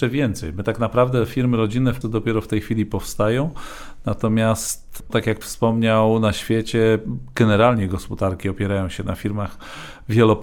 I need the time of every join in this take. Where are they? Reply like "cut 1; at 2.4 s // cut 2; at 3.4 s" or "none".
cut 1; at 2.0 s // cut 2; at 5.1 s // cut 3; at 5.4 s